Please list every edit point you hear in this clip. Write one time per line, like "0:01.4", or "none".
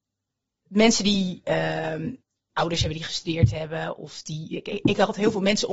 none